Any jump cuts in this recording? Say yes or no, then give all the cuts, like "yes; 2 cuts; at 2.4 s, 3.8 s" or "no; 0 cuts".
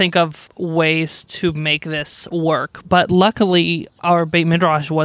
no; 0 cuts